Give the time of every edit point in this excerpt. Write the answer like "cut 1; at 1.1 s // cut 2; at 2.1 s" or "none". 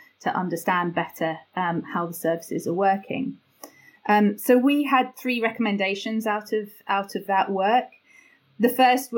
none